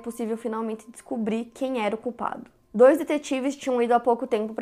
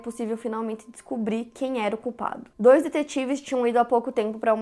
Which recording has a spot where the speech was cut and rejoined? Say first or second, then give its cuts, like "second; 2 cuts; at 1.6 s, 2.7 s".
second; 1 cut; at 2.5 s